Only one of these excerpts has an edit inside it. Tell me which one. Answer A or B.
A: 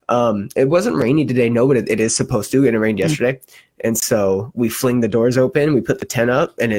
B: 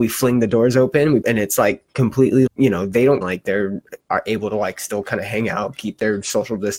B